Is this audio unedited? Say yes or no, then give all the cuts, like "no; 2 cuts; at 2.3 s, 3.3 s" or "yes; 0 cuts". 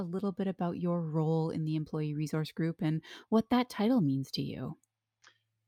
yes; 0 cuts